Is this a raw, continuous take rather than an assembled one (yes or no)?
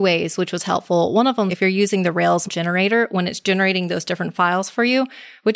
no